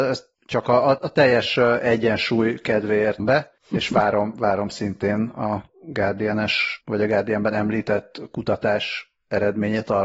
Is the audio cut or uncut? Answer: cut